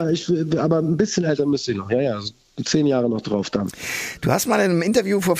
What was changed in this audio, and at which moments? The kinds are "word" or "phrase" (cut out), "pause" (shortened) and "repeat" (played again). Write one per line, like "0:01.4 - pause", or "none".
none